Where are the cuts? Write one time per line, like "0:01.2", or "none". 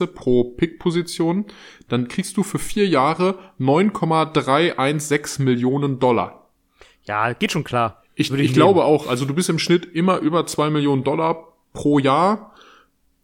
none